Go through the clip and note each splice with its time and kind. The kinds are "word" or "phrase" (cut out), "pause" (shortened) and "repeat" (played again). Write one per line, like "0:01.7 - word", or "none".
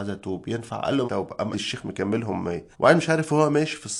0:01.1 - word
0:01.5 - word
0:02.7 - pause